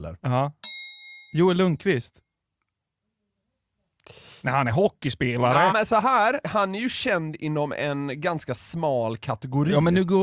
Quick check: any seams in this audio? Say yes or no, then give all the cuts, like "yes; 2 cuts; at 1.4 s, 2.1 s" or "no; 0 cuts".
yes; 4 cuts; at 1.3 s, 4.4 s, 5.7 s, 6.4 s